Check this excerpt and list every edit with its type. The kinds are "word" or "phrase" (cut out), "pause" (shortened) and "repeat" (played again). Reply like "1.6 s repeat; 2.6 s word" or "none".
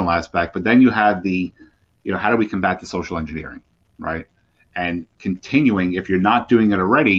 none